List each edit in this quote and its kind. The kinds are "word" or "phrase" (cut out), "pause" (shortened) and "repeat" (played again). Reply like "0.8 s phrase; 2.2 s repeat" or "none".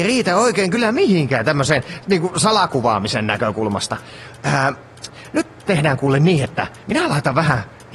5.7 s word; 6.8 s pause